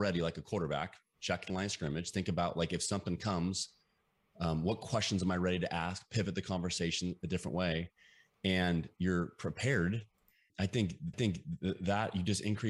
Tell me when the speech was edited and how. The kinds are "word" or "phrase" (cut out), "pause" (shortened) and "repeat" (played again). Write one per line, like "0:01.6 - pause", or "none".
0:10.5 - word
0:11.1 - repeat